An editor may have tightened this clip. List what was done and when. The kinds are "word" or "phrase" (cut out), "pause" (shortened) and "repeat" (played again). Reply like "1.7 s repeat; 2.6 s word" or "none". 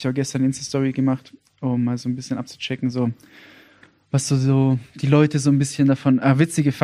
none

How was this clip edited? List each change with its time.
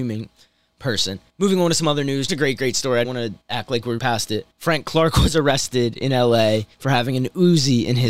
1.3 s pause; 2.3 s word; 3.0 s word; 3.4 s pause; 4.0 s phrase; 4.5 s pause; 6.7 s pause

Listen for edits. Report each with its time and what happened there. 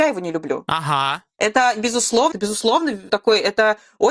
2.3 s word; 3.1 s word

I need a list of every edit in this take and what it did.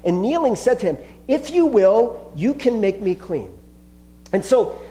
none

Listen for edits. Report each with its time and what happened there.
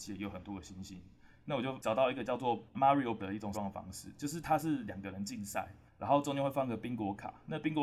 3.2 s word; 3.5 s word; 5.9 s pause

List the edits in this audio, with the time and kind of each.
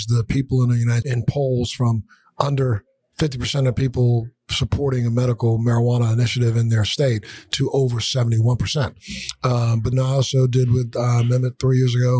1.0 s word; 9.9 s word

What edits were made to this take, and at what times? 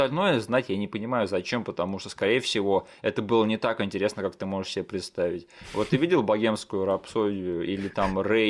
none

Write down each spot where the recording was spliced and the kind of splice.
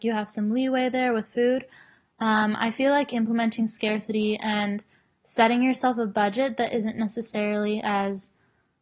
none

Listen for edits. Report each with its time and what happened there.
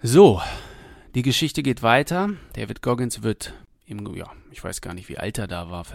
none

